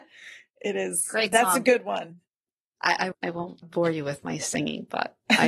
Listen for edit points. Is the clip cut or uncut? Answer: cut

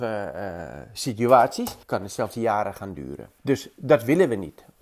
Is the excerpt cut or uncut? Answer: cut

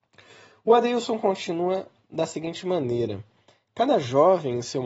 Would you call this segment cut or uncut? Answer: uncut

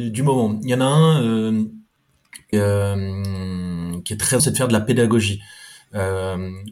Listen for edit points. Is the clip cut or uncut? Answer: cut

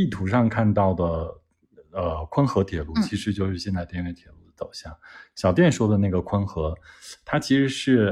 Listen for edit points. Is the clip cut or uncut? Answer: uncut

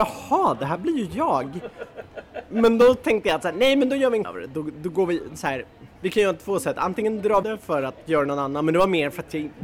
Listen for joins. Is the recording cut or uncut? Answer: cut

